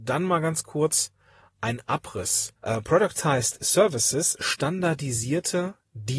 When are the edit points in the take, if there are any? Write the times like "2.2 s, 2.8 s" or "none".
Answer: 2.6 s, 4.4 s

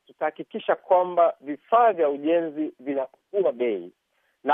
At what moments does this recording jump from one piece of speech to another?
none

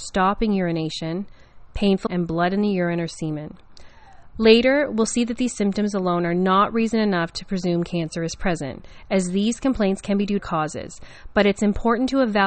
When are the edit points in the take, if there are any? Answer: 2.1 s, 10.4 s

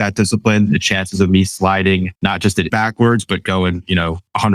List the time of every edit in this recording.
2.1 s, 2.7 s

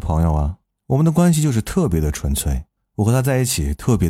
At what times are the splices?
none

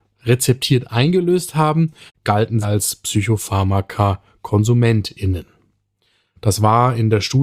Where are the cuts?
2.1 s, 2.6 s

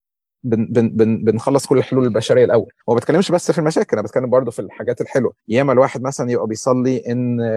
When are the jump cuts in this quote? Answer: 2.8 s, 5.4 s

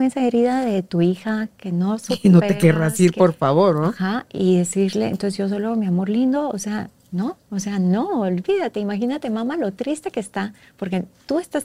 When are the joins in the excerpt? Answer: 7.4 s

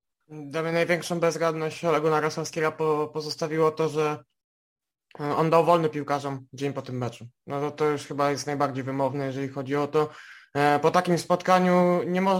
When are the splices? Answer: none

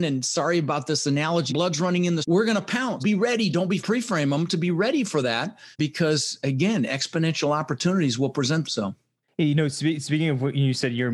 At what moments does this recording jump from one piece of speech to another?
1.5 s, 2.2 s, 3.0 s, 3.8 s, 5.7 s, 8.6 s

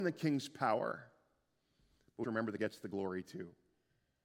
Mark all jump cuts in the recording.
2.2 s, 2.6 s

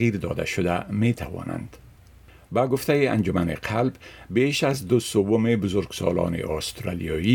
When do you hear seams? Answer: none

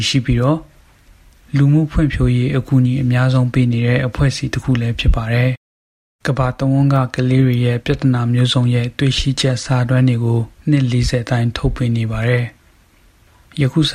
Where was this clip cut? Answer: 5.6 s, 10.6 s, 12.6 s

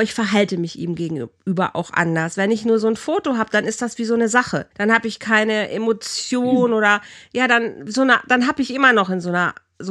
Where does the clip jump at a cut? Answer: 4.7 s

